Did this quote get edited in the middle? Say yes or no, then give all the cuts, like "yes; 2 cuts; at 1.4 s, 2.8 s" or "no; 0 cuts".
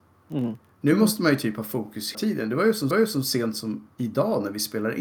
yes; 3 cuts; at 2.1 s, 2.9 s, 3.9 s